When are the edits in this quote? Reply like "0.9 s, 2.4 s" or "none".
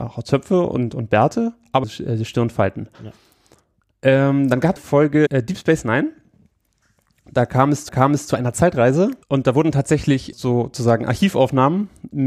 1.8 s, 2.9 s, 4.8 s, 5.3 s, 7.9 s, 9.2 s, 10.3 s